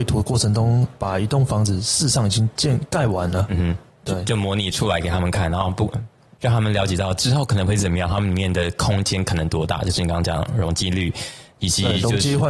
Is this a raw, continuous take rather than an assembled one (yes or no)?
yes